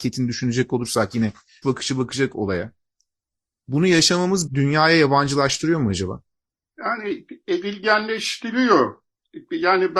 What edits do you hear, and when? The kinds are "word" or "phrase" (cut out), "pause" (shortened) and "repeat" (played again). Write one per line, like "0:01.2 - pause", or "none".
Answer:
0:01.6 - word
0:02.3 - word
0:04.5 - word